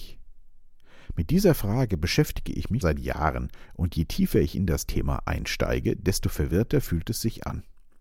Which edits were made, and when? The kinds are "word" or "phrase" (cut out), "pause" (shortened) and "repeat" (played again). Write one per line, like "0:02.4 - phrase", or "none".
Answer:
0:02.8 - word